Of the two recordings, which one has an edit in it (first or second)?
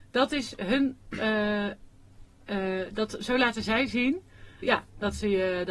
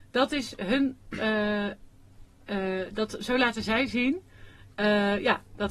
first